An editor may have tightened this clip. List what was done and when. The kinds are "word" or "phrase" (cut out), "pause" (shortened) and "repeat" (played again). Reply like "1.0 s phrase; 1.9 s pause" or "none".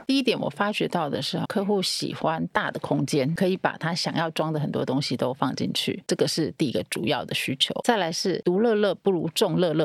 1.5 s word